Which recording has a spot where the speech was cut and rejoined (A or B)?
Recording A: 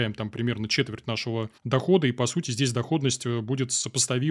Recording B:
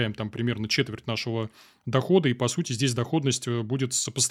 A